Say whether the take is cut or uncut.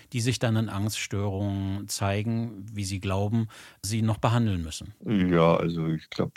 cut